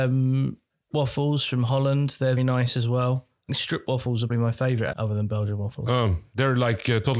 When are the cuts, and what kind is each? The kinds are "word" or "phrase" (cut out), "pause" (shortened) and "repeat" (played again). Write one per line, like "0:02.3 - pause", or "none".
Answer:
0:00.9 - word
0:02.4 - word
0:03.5 - word
0:04.3 - word
0:04.9 - word